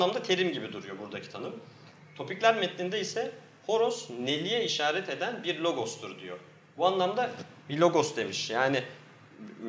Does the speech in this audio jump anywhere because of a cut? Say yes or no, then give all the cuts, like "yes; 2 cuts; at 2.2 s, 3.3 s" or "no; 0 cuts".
no; 0 cuts